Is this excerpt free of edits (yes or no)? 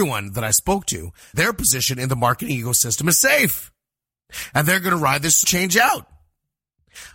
no